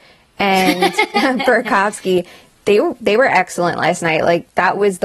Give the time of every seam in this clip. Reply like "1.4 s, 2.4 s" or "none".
none